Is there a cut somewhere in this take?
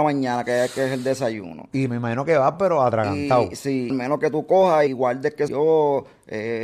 yes; 3 cuts; at 3.9 s, 4.9 s, 5.5 s

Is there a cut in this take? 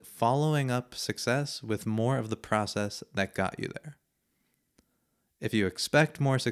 no; 0 cuts

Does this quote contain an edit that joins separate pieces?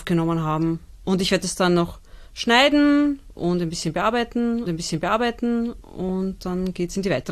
yes; 2 cuts; at 2.3 s, 4.7 s

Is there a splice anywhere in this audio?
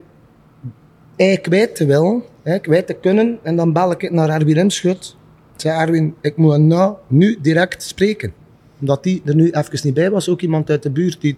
no; 0 cuts

